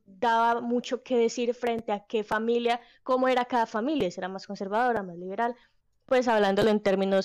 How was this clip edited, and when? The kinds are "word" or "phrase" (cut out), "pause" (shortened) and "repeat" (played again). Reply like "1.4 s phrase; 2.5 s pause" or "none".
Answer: none